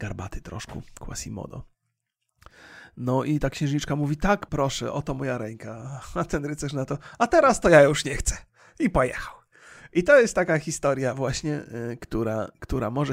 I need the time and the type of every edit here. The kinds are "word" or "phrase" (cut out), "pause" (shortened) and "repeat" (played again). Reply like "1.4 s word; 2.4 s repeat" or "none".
4.5 s word